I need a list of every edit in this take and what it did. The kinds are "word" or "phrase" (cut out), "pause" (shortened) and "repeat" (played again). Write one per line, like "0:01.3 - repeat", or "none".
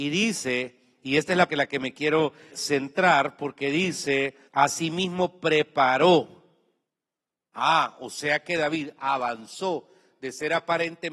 0:01.5 - phrase
0:02.5 - word
0:04.5 - pause